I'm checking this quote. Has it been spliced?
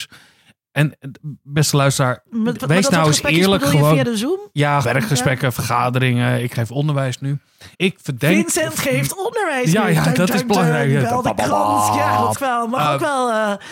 yes; 3 cuts; at 4.8 s, 7.7 s, 12.3 s

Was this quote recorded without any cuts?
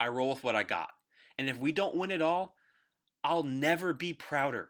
yes; 0 cuts

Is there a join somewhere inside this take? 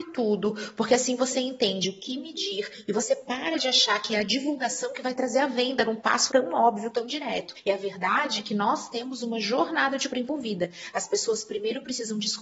yes; 2 cuts; at 6.3 s, 10.1 s

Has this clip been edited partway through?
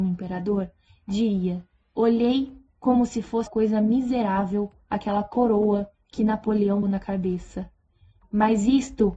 yes; 2 cuts; at 3.5 s, 6.8 s

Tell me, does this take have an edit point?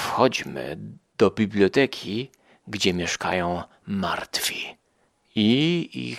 no; 0 cuts

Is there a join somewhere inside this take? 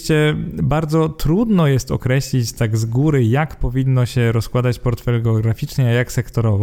no; 0 cuts

